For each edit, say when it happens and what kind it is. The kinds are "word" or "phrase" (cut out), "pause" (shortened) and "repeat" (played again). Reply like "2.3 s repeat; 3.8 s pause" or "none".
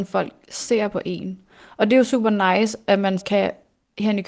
3.2 s word